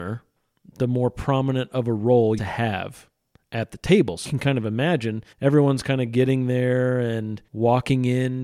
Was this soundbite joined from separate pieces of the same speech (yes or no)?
yes